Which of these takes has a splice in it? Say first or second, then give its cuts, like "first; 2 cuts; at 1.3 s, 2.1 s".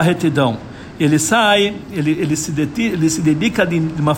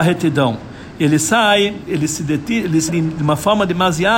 second; 2 cuts; at 1.9 s, 2.9 s